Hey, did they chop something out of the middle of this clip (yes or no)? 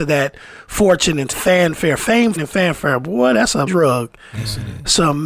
yes